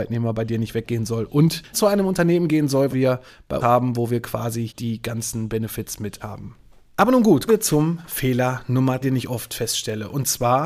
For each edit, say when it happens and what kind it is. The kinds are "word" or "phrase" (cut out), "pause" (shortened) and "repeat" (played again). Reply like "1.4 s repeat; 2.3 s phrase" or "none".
1.7 s word; 2.9 s word; 3.6 s word; 4.7 s word; 6.2 s word; 7.5 s word; 9.0 s word